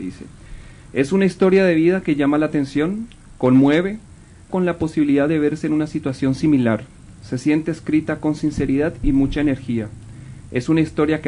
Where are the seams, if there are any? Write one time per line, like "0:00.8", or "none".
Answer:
0:04.5